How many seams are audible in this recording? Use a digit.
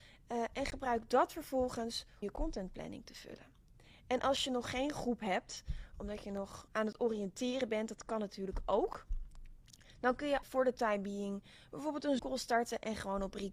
4